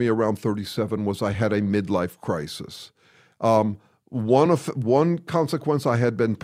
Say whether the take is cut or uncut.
uncut